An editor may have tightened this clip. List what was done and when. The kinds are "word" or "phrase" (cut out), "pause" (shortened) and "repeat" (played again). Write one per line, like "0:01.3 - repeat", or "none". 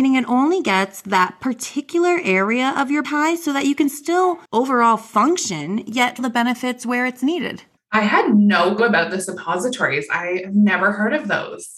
0:03.0 - word
0:04.4 - pause
0:06.2 - word
0:07.8 - pause
0:08.8 - word